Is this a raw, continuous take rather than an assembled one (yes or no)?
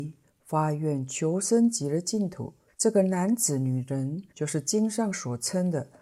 no